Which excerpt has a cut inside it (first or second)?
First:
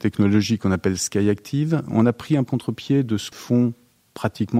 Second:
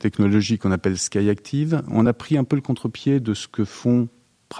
first